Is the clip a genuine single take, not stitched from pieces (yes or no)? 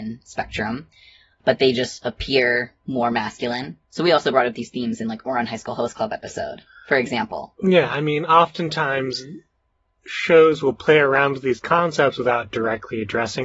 yes